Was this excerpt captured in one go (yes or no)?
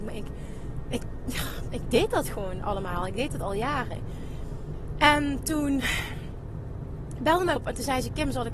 no